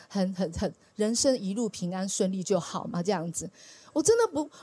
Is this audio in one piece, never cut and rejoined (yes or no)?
yes